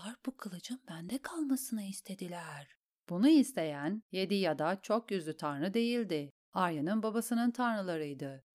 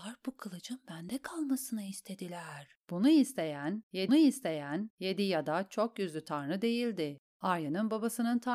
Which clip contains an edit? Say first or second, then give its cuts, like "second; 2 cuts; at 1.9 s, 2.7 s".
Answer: second; 2 cuts; at 2.8 s, 4.1 s